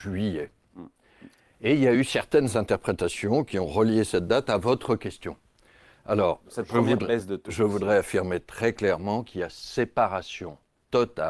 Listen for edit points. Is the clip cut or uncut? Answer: uncut